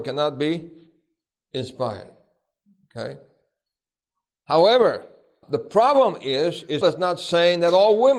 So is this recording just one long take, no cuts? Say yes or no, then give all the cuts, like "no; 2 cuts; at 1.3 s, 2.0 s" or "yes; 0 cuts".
no; 2 cuts; at 5.4 s, 6.8 s